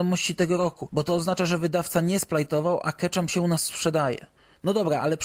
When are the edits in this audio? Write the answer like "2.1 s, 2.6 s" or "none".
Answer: none